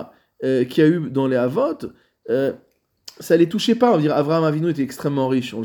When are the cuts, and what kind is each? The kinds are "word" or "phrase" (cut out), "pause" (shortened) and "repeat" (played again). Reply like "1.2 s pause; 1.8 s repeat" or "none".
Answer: none